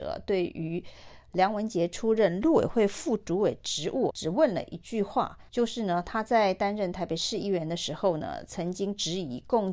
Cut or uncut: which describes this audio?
cut